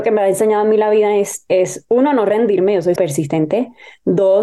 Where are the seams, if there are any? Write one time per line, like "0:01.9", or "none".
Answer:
0:03.0

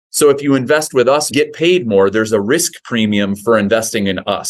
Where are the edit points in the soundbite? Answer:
0:01.3

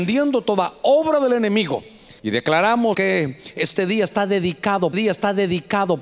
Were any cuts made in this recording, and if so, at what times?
0:02.2
0:02.9
0:04.9

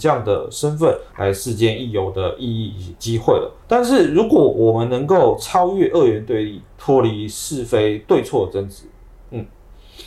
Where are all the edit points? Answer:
0:01.1
0:03.6
0:06.7

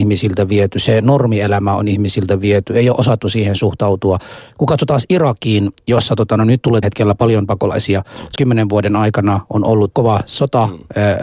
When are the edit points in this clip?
0:06.8
0:08.4
0:09.9

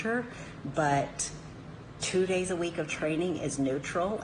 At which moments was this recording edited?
none

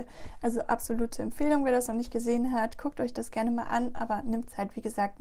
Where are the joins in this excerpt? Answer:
none

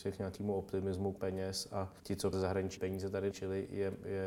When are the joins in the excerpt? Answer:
0:01.2
0:02.0
0:02.3
0:02.8
0:03.3

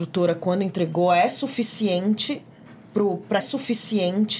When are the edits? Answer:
0:03.4

